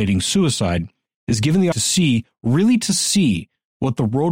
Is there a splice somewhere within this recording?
yes; 1 cut; at 1.7 s

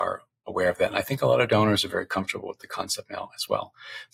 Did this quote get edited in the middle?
no; 0 cuts

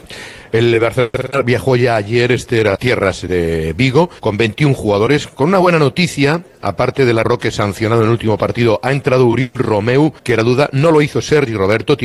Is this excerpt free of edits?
no; 4 cuts; at 2.7 s, 4.2 s, 7.2 s, 10.2 s

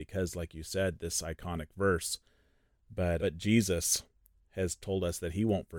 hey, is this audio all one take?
no; 1 cut; at 3.2 s

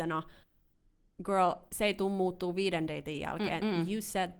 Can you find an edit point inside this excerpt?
no; 0 cuts

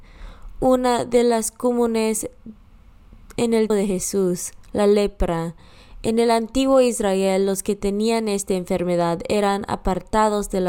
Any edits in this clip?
yes; 1 cut; at 3.7 s

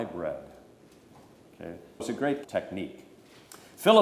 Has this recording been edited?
yes; 2 cuts; at 2.0 s, 2.4 s

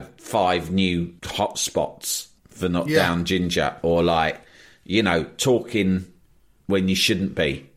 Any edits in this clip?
yes; 2 cuts; at 1.2 s, 2.4 s

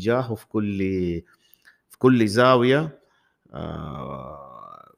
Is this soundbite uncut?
yes; 0 cuts

